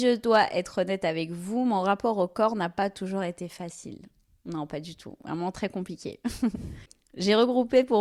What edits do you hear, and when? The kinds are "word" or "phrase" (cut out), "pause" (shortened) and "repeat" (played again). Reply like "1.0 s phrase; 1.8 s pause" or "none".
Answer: none